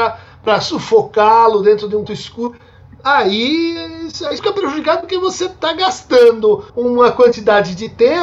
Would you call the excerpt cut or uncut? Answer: cut